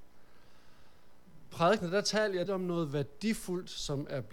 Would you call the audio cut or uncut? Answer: cut